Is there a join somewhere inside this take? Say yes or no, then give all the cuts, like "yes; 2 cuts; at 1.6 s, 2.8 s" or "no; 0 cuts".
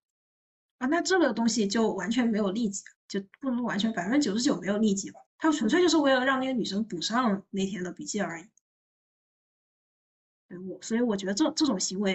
yes; 2 cuts; at 3.0 s, 5.3 s